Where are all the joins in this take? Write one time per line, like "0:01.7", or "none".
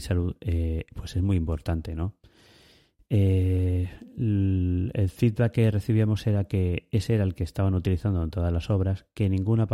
none

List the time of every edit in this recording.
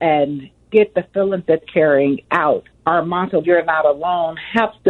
0:01.6
0:02.7
0:03.4

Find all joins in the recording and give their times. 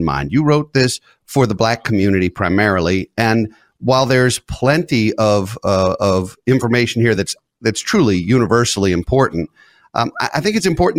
none

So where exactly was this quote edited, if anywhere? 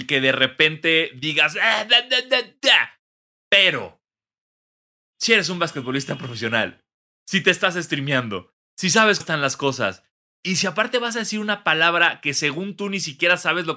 0:09.2

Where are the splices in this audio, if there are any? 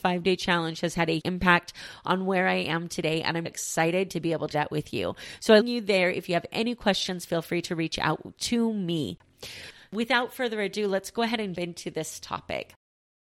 0:01.2
0:03.5
0:04.5
0:05.6
0:11.5

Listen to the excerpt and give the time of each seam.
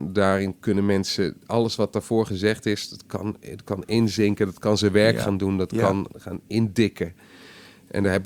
0:06.1

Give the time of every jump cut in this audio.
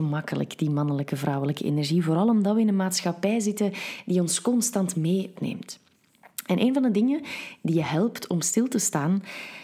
0:05.3

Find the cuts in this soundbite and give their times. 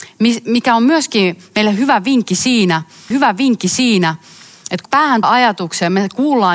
0:03.1
0:04.9
0:05.2

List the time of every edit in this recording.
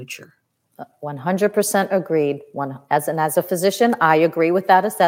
none

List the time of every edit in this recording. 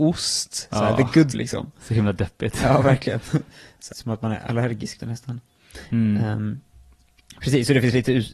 0:01.3
0:03.9
0:05.0

